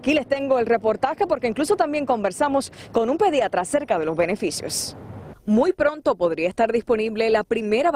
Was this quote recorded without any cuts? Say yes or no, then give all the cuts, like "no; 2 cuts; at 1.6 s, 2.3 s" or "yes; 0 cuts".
yes; 0 cuts